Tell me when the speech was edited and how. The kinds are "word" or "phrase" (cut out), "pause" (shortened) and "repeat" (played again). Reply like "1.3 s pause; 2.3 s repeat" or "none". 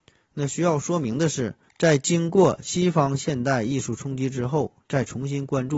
1.7 s pause